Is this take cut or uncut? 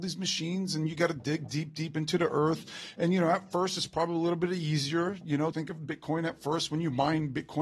cut